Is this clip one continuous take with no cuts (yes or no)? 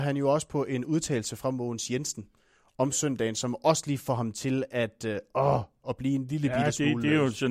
yes